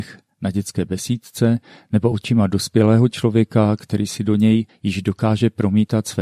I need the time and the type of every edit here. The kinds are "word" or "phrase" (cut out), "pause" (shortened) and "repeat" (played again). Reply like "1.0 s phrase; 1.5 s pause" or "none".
none